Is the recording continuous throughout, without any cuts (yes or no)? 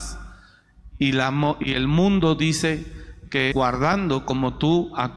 no